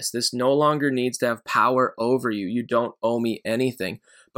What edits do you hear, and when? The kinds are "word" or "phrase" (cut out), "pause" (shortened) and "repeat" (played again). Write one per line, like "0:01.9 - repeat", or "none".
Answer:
none